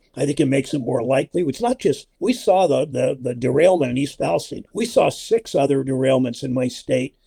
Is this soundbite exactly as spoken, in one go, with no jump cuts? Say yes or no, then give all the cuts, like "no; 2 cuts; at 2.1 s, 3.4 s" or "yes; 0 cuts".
no; 2 cuts; at 2.1 s, 4.7 s